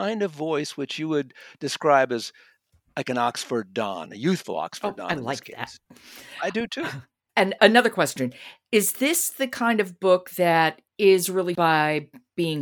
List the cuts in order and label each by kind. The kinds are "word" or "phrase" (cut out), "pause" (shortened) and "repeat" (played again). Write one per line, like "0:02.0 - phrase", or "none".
0:07.6 - word
0:10.9 - pause
0:11.5 - word